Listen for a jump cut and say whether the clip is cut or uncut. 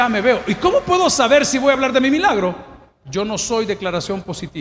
uncut